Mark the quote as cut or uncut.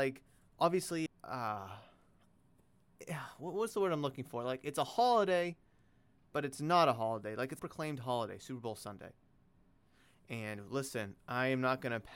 cut